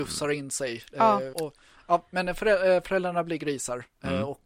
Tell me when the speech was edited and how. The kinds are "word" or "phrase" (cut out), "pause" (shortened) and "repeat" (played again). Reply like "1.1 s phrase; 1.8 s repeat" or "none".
1.3 s word